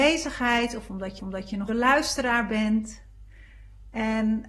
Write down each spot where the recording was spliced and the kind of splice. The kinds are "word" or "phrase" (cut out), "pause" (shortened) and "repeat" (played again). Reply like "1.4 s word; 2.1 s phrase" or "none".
1.2 s repeat; 1.7 s word